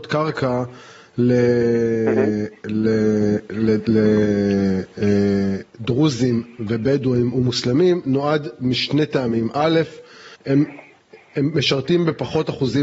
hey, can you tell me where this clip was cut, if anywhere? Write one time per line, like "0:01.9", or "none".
0:10.3

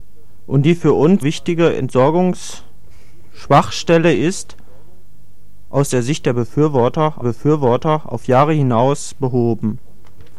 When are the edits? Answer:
0:01.2
0:07.2

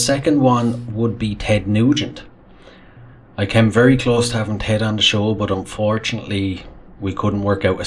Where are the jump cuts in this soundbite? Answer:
none

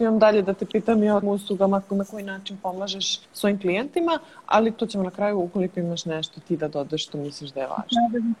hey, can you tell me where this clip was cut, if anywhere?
0:01.2
0:03.2
0:04.8

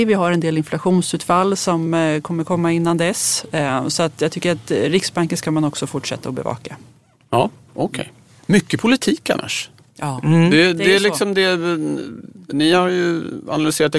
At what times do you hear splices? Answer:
none

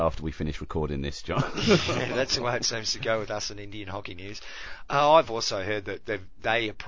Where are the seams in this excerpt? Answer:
none

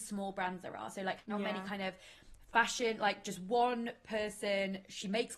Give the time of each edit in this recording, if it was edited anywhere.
none

